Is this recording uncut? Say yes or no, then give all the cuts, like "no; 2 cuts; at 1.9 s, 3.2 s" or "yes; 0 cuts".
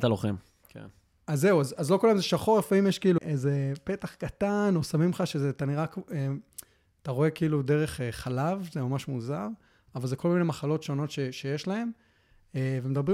no; 1 cut; at 3.2 s